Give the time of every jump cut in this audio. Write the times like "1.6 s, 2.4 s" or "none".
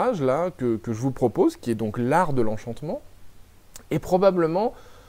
none